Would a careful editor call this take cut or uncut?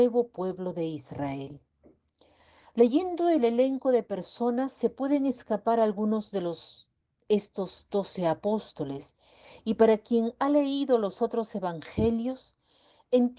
uncut